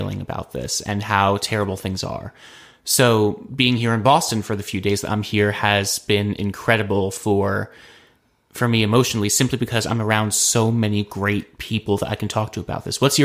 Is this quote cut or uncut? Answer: uncut